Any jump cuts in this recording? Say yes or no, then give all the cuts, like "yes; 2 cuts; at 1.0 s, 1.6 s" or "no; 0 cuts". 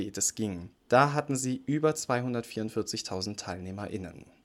no; 0 cuts